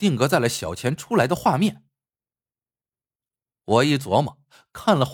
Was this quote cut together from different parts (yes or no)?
no